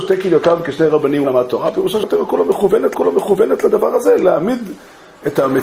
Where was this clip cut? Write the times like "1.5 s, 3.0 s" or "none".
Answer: 1.2 s, 2.0 s, 2.9 s